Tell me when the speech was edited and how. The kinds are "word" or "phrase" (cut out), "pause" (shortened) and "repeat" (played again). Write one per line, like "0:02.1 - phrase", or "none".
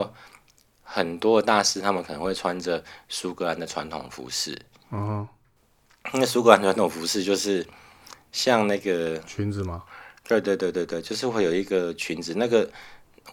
none